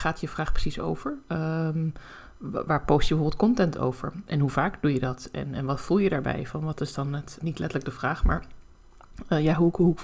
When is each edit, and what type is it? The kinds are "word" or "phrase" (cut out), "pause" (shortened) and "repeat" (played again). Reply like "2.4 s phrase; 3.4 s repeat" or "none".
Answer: 7.4 s word